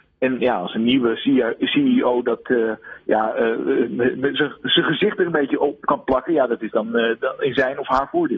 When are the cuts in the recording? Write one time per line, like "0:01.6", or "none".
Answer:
none

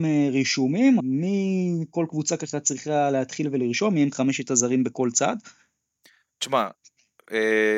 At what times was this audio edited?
0:01.0

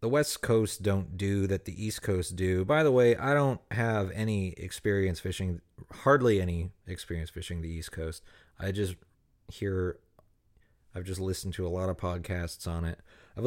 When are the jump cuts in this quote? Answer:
none

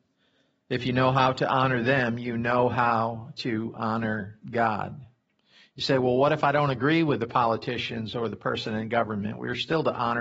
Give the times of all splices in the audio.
none

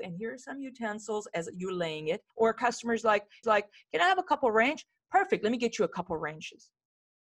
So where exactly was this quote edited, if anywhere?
0:02.3
0:03.4

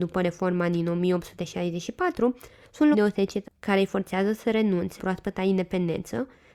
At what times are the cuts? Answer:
0:02.9
0:03.4
0:05.0

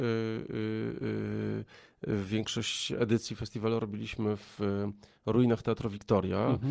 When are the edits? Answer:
none

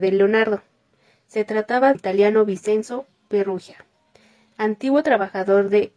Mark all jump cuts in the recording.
0:01.9

